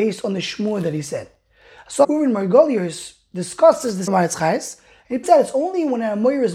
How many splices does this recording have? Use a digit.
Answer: 3